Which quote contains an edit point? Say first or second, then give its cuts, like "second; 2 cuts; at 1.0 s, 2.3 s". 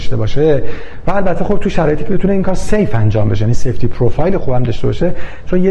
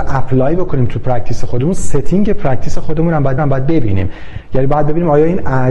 second; 1 cut; at 3.4 s